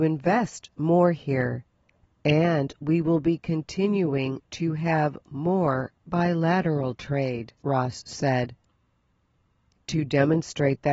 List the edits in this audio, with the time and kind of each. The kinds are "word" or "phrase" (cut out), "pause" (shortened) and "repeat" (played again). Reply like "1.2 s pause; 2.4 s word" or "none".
7.6 s pause